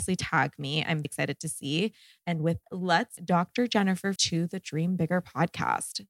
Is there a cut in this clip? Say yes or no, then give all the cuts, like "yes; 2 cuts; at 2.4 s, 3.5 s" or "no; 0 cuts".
yes; 4 cuts; at 1.0 s, 2.6 s, 3.2 s, 4.2 s